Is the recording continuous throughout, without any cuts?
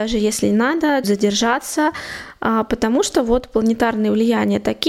no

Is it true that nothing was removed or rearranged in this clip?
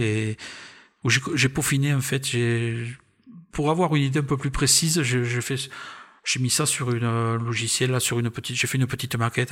yes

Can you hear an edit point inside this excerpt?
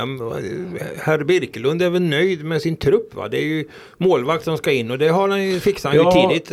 no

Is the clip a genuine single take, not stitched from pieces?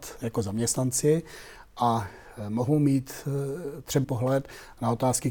no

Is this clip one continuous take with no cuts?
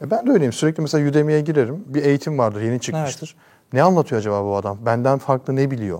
yes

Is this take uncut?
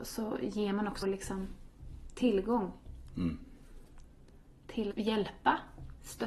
no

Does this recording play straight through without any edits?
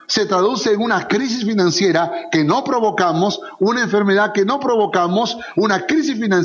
yes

